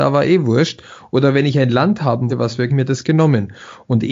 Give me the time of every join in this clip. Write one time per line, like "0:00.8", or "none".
0:02.3
0:02.7